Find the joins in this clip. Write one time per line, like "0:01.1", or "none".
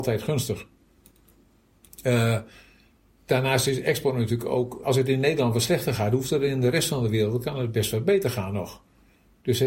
0:04.8